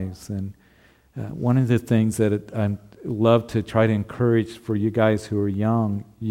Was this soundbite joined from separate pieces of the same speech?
no; 0 cuts

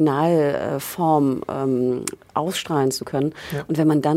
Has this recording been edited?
no; 0 cuts

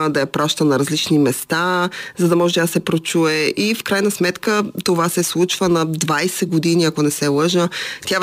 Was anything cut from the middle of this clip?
no; 0 cuts

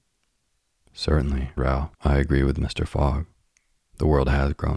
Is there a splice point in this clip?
yes; 2 cuts; at 1.6 s, 1.9 s

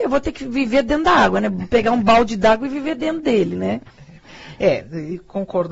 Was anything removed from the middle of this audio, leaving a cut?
no; 0 cuts

